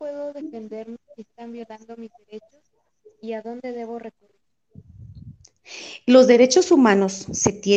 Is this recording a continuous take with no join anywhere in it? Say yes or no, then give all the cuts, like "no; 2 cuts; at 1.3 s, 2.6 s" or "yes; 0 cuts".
yes; 0 cuts